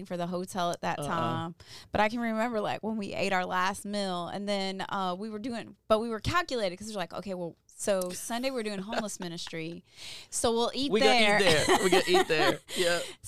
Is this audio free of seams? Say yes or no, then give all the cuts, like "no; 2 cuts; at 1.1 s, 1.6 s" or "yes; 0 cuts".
yes; 0 cuts